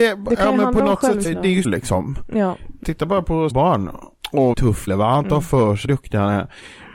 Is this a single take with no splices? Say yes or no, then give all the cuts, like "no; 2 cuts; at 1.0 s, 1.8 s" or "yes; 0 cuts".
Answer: no; 7 cuts; at 1.2 s, 1.6 s, 2.8 s, 3.5 s, 4.5 s, 4.9 s, 5.9 s